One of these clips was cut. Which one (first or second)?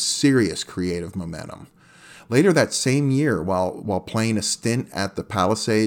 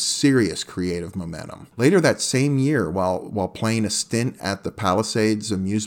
second